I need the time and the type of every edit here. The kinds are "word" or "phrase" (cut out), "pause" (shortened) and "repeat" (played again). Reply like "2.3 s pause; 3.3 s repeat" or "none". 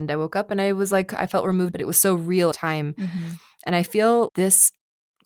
1.7 s phrase; 2.5 s phrase; 4.3 s word